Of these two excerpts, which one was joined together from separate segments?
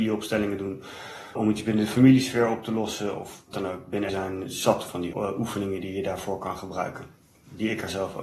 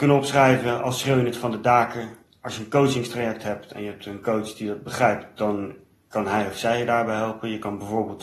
first; 4 cuts; at 1.4 s, 3.5 s, 4.1 s, 5.1 s

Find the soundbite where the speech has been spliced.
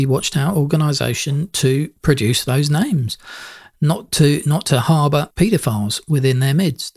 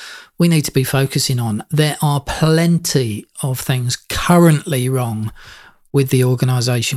first; 1 cut; at 2.0 s

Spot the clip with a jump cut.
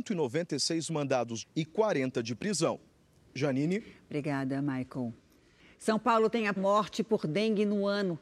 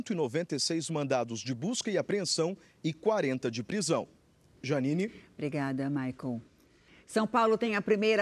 first; 2 cuts; at 1.4 s, 6.6 s

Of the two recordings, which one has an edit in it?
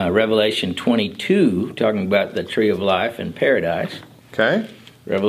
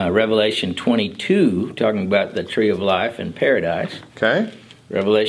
second; 1 cut; at 4.1 s

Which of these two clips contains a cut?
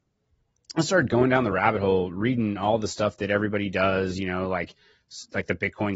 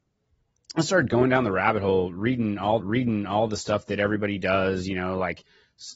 second; 1 cut; at 2.8 s

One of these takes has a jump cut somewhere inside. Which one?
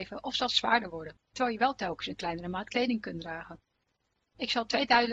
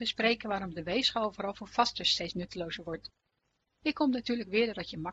first; 1 cut; at 1.2 s

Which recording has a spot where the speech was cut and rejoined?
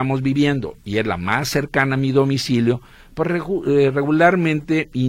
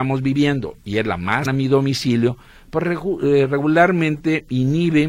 second; 1 cut; at 1.5 s

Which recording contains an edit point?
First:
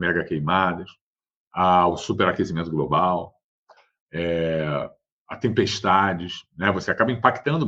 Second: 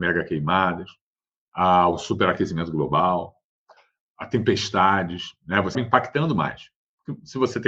second; 2 cuts; at 4.0 s, 5.7 s

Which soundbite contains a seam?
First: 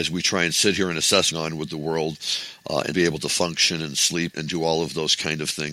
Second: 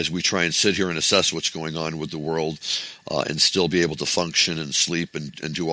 first; 3 cuts; at 1.3 s, 2.9 s, 4.3 s

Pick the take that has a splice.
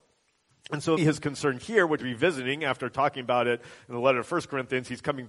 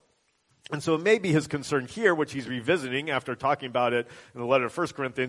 first; 2 cuts; at 1.0 s, 2.0 s

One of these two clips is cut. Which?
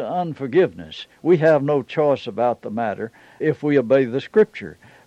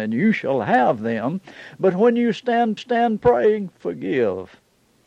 second; 1 cut; at 2.8 s

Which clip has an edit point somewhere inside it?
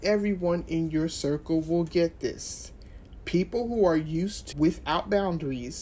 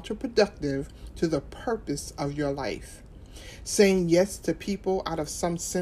first; 1 cut; at 4.5 s

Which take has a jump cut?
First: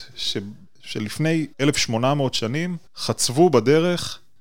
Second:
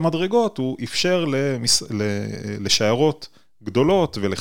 first; 2 cuts; at 1.5 s, 2.9 s

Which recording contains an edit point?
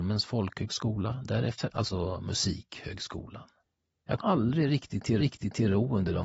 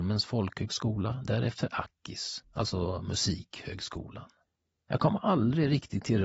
first; 3 cuts; at 1.7 s, 4.2 s, 5.2 s

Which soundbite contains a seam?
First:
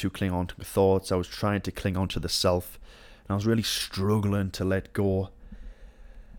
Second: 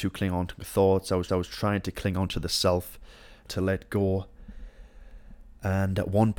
second; 2 cuts; at 1.3 s, 3.5 s

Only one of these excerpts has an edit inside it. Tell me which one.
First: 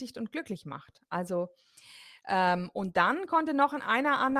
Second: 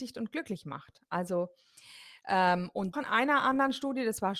second; 1 cut; at 2.9 s

